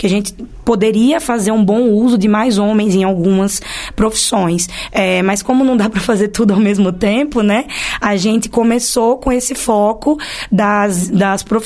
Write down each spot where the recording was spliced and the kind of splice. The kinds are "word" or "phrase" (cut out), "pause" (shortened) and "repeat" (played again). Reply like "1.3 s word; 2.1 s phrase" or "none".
none